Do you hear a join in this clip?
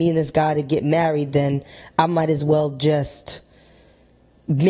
no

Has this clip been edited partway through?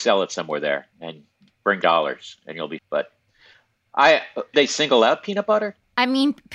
yes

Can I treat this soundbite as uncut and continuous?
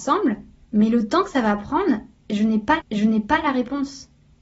no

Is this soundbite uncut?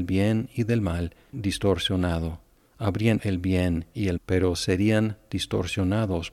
no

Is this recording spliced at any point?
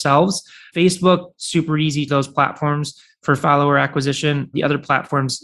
yes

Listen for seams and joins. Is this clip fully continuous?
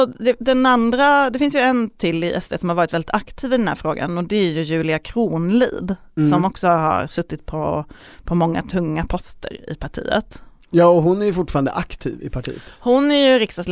yes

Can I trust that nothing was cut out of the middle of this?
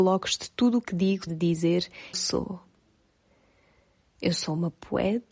no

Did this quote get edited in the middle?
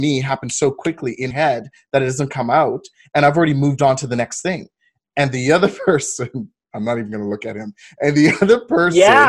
yes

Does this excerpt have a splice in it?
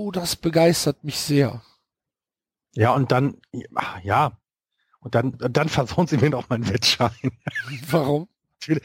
yes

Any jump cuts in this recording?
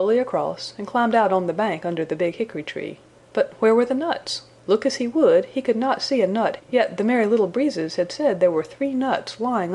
yes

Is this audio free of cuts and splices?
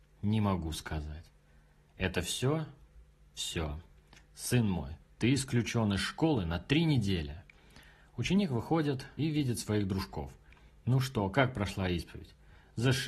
no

